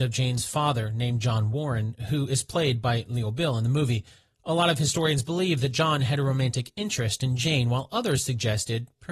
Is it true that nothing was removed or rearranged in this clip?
yes; 0 cuts

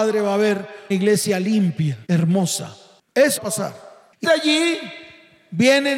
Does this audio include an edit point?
yes; 4 cuts; at 0.9 s, 2.1 s, 3.4 s, 4.2 s

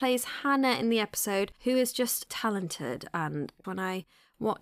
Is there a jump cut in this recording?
yes; 3 cuts; at 1.6 s, 2.3 s, 3.6 s

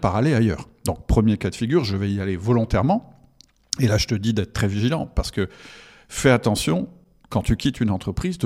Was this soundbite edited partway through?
no; 0 cuts

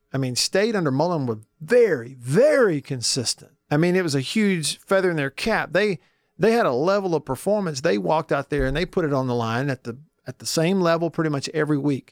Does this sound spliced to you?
yes; 1 cut; at 3.6 s

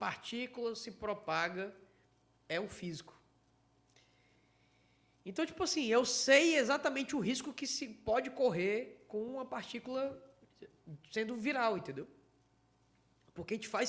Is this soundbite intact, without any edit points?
yes; 0 cuts

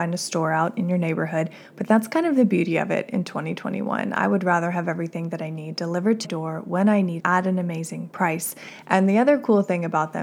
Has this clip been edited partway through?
yes; 2 cuts; at 6.2 s, 7.2 s

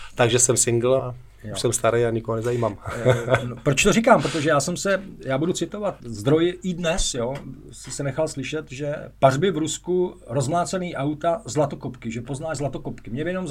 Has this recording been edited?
yes; 2 cuts; at 1.0 s, 6.0 s

